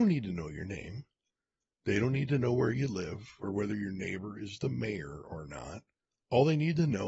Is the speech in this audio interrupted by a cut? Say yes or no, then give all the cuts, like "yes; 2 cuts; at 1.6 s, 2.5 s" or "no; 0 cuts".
no; 0 cuts